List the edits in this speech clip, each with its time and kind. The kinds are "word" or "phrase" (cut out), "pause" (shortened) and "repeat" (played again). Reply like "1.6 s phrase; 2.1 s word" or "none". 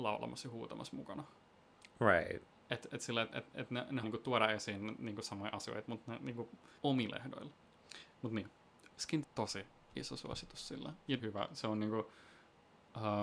2.5 s pause; 4.0 s word; 6.8 s pause; 9.2 s phrase; 11.2 s phrase